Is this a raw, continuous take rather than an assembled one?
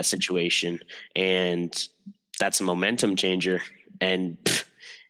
yes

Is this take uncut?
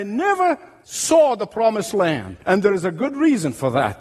no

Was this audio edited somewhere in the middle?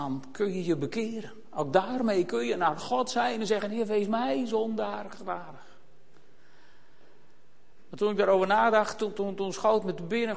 no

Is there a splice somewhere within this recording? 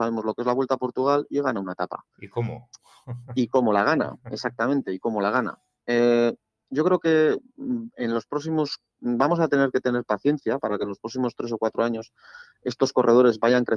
yes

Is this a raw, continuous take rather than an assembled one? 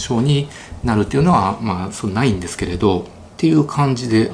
no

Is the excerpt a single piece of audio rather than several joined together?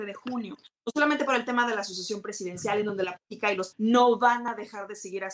no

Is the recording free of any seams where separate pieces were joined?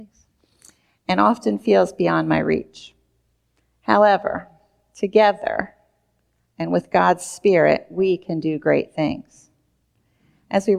yes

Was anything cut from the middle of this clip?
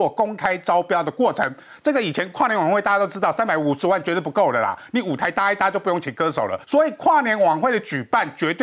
yes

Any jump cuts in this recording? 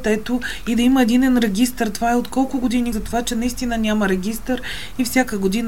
yes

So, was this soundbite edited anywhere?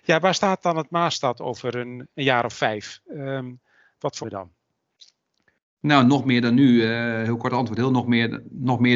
yes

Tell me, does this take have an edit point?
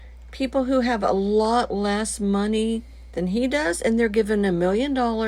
no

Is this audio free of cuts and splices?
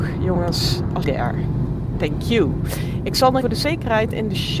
no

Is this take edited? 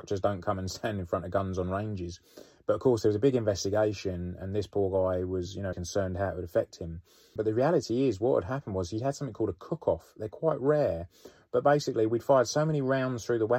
yes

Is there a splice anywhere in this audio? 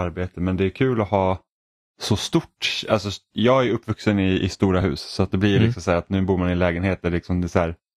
no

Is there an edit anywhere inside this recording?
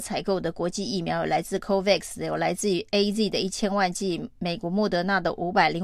no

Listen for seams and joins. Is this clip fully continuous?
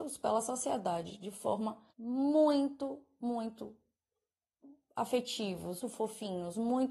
no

